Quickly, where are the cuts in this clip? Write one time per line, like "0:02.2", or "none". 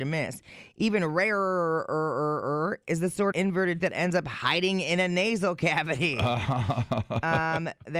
0:03.3
0:03.8